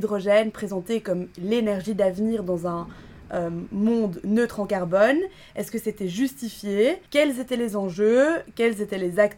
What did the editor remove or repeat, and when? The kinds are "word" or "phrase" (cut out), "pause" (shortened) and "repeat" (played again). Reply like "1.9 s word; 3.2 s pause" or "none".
7.1 s pause